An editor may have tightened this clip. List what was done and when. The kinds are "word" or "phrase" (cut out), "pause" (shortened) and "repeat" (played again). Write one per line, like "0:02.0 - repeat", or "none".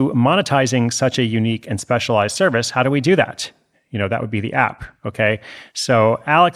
none